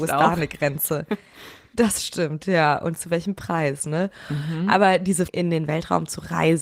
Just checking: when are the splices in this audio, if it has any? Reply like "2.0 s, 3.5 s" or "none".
5.3 s